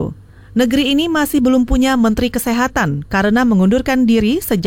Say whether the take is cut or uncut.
uncut